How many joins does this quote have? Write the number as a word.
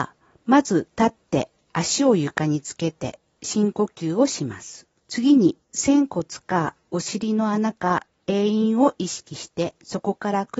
two